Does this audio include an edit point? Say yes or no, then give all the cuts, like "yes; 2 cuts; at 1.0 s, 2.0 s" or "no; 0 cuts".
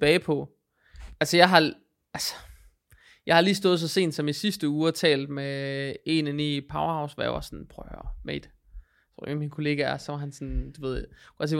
no; 0 cuts